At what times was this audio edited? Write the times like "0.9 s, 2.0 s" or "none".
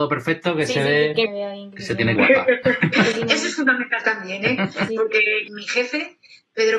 1.3 s, 2.2 s, 4.9 s